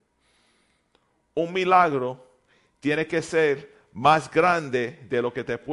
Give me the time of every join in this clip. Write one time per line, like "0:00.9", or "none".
none